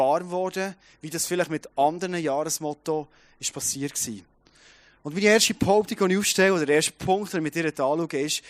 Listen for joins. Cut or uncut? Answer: uncut